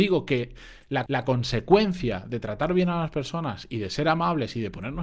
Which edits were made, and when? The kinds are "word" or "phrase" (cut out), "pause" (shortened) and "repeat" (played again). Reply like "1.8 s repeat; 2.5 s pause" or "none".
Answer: 1.1 s repeat